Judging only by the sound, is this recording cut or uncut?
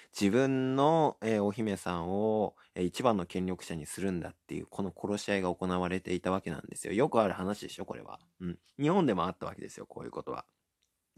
uncut